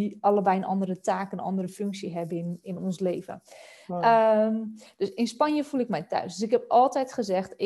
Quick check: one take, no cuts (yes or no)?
yes